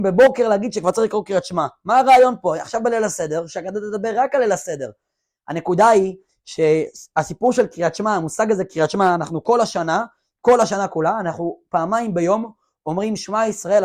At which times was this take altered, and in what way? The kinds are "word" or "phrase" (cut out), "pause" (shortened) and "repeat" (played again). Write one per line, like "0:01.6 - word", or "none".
none